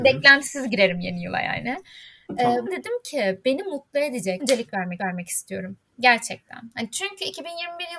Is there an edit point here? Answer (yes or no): yes